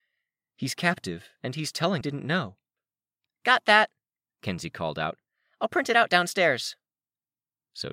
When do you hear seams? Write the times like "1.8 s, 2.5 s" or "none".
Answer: 2.0 s